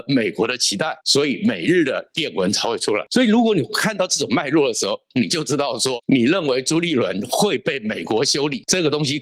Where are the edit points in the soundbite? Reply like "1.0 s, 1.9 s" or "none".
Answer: 1.0 s